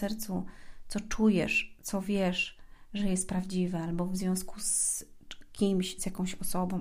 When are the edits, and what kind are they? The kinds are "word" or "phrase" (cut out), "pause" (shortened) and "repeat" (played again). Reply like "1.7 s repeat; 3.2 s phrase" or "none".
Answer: none

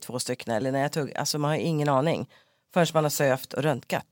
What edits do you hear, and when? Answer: none

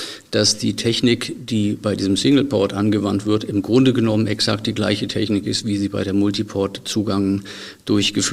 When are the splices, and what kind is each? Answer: none

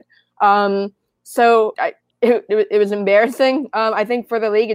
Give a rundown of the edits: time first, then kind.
1.7 s phrase

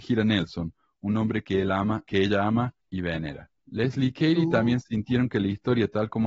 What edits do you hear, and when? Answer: 2.8 s pause; 3.6 s pause

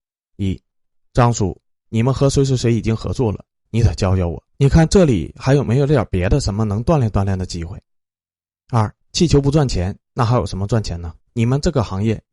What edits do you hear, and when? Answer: 4.5 s pause; 9.0 s pause; 11.2 s pause

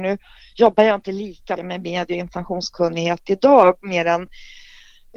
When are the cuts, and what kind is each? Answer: 1.6 s word

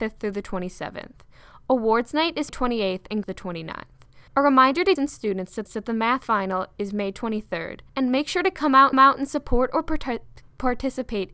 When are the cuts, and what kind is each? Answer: 2.5 s word; 3.2 s phrase; 4.3 s pause; 5.0 s word; 5.7 s repeat; 7.9 s pause; 8.9 s repeat

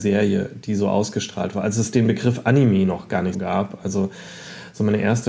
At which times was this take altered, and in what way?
3.3 s word

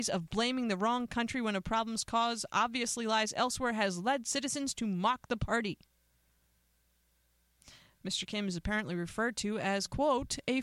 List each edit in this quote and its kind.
none

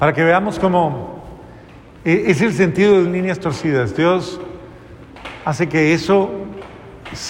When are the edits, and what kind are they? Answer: 3.0 s phrase

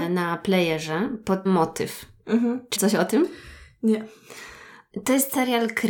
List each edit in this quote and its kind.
1.5 s word; 2.8 s word

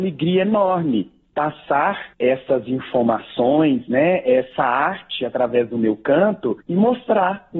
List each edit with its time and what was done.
2.1 s pause; 6.6 s pause

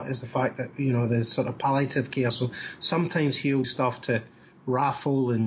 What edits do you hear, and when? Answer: 3.6 s word

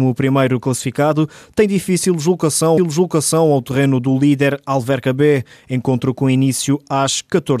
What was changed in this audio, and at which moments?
2.8 s repeat

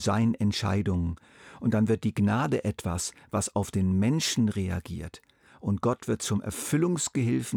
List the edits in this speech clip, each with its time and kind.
none

